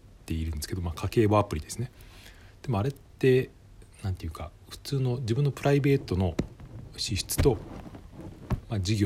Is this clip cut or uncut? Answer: uncut